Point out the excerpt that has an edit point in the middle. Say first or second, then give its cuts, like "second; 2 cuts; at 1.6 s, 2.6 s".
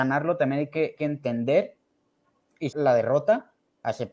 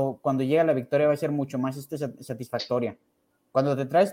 first; 2 cuts; at 1.0 s, 2.7 s